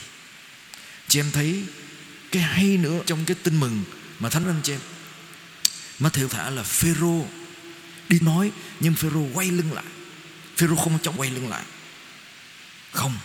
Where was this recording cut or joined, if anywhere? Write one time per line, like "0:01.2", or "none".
0:01.1
0:02.3
0:03.0
0:04.4
0:06.3
0:08.2
0:11.2